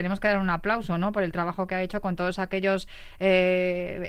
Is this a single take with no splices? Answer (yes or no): yes